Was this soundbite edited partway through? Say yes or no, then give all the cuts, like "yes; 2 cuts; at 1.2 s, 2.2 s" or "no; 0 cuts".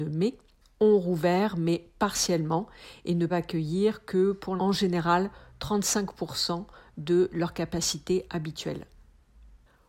yes; 2 cuts; at 3.3 s, 4.6 s